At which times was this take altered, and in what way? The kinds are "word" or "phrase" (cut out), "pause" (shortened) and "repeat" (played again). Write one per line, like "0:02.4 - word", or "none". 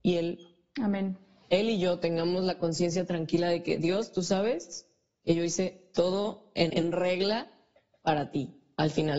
0:06.7 - word